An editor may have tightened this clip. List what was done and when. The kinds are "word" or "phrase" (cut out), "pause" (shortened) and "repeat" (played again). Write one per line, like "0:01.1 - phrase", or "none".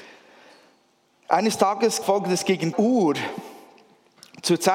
0:02.0 - word
0:02.7 - word